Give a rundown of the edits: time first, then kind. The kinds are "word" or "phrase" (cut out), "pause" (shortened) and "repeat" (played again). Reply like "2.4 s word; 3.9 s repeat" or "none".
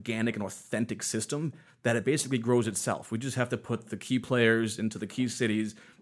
none